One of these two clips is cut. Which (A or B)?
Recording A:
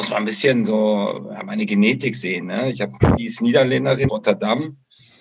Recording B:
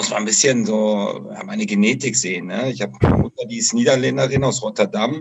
A